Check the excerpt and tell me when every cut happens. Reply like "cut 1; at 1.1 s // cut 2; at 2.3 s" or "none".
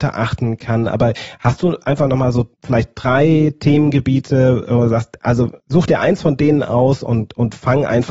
cut 1; at 2.5 s // cut 2; at 5.6 s